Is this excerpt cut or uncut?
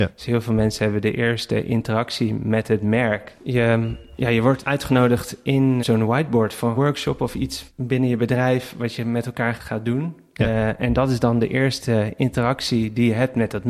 cut